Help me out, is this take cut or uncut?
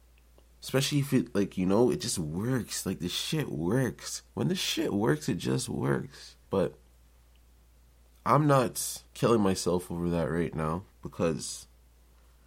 cut